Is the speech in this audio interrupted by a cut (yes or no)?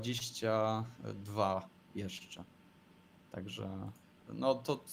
no